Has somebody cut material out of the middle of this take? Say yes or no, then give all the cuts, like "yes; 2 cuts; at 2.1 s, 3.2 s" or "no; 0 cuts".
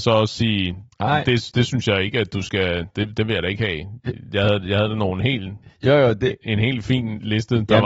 no; 0 cuts